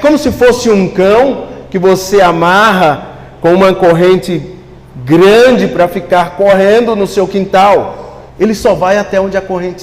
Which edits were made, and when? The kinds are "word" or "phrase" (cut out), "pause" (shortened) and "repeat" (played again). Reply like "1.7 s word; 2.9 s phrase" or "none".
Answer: 8.3 s pause